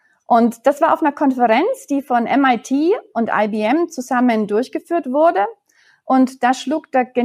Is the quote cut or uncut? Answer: uncut